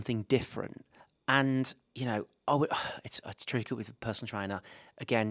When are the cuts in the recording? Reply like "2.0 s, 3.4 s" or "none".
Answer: 1.0 s